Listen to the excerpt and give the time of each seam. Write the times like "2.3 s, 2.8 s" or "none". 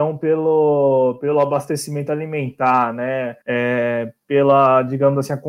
3.4 s

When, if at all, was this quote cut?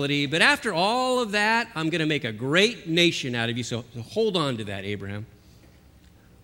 none

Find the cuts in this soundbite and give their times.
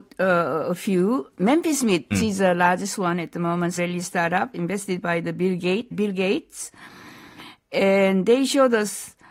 2.1 s, 3.8 s, 5.9 s

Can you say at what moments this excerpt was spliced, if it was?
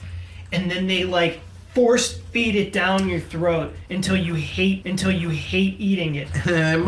4.8 s

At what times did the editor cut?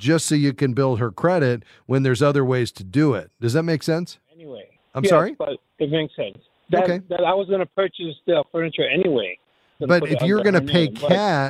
4.8 s, 6.5 s, 9.8 s

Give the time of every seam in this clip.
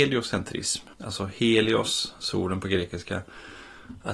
0.9 s

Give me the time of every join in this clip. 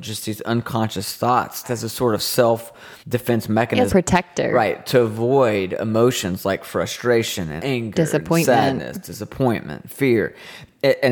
1.6 s, 3.0 s, 3.9 s, 7.6 s

